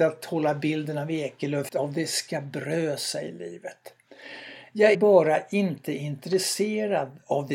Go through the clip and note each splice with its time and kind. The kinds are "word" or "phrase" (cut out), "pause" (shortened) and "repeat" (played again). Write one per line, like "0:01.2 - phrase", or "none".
0:01.7 - phrase
0:04.9 - word